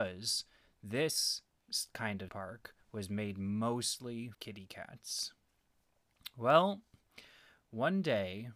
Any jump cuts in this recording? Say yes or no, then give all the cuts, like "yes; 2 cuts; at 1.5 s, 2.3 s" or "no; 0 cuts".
yes; 3 cuts; at 2.3 s, 2.8 s, 4.3 s